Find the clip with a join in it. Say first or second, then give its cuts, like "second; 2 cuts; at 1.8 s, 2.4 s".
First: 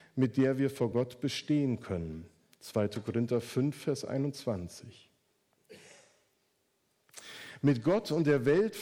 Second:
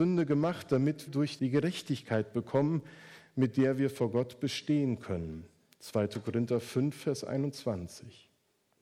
second; 2 cuts; at 1.1 s, 1.4 s